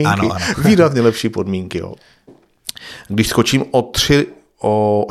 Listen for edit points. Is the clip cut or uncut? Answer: uncut